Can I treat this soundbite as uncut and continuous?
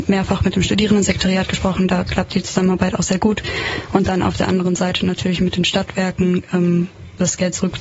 yes; 0 cuts

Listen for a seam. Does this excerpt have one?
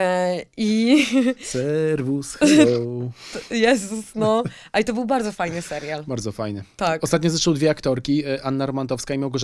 no; 0 cuts

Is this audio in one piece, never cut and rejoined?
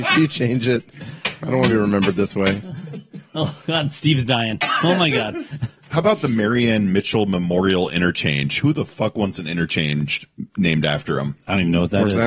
yes; 0 cuts

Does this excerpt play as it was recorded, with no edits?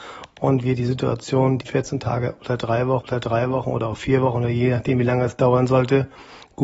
no; 2 cuts; at 1.6 s, 3.0 s

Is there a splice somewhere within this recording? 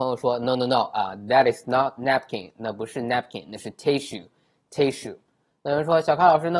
no; 0 cuts

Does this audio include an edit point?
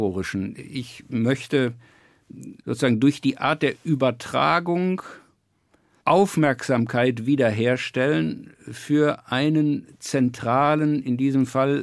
no; 0 cuts

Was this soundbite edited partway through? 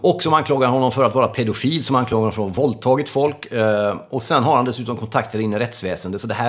no; 0 cuts

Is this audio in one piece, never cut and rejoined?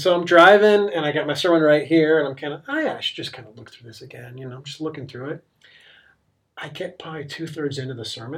yes; 0 cuts

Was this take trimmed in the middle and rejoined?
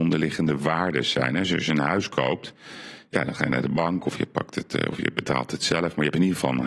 no; 0 cuts

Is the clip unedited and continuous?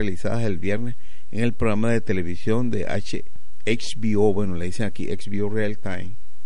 yes; 0 cuts

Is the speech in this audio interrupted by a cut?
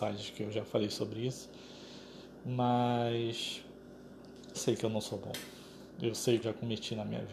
yes; 2 cuts; at 4.5 s, 6.4 s

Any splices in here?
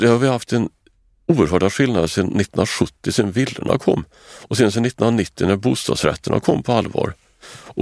no; 0 cuts

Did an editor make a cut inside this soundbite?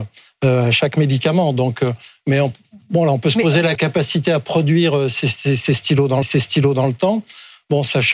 yes; 2 cuts; at 3.8 s, 6.2 s

